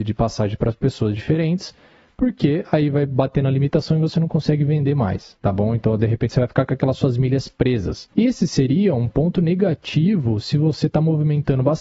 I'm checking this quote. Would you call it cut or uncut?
cut